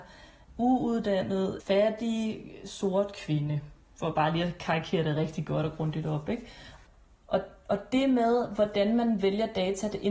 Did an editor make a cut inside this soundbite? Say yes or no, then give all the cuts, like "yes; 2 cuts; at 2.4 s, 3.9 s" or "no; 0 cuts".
no; 0 cuts